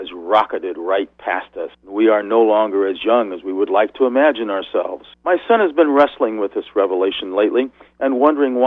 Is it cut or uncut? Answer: cut